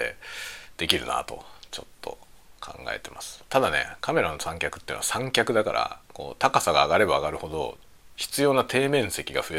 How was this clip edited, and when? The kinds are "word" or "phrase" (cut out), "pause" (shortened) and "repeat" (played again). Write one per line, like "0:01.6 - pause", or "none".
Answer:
0:06.0 - pause